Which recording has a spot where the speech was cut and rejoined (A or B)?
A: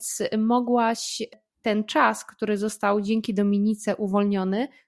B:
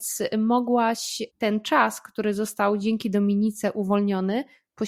B